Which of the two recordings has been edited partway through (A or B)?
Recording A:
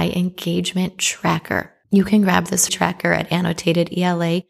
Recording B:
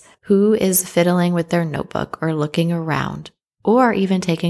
A